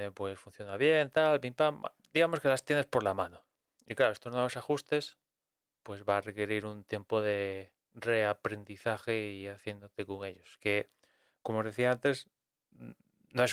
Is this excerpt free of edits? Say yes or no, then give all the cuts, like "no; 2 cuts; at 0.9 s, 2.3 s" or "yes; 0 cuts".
yes; 0 cuts